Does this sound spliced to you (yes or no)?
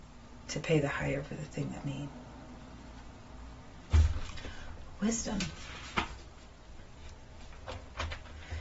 yes